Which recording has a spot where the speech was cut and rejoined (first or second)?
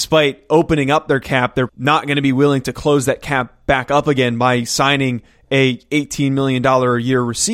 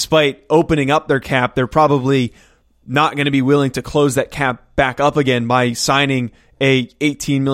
first